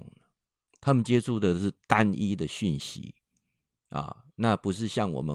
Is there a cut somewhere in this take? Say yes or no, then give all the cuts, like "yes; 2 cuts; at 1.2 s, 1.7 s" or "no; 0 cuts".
no; 0 cuts